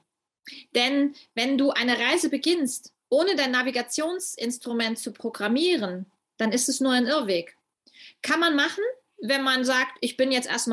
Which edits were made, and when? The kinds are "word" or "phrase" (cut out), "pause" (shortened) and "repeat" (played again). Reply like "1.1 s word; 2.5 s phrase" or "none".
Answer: none